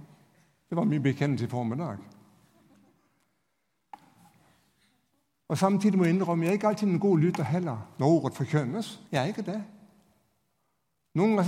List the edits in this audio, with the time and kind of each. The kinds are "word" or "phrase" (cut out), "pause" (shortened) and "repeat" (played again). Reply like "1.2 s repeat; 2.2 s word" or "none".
9.1 s pause